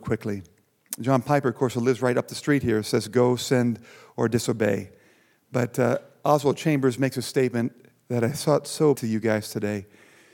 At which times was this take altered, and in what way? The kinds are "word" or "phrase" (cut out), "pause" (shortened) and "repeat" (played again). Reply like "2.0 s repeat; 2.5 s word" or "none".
9.0 s word